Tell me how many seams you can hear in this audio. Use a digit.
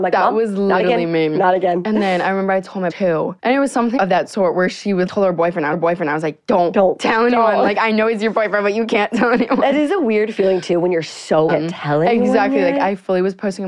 6